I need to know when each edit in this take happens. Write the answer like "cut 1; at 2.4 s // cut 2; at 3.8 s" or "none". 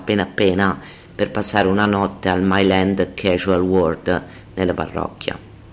cut 1; at 4.7 s

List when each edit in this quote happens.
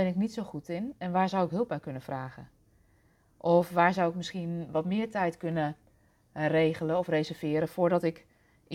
none

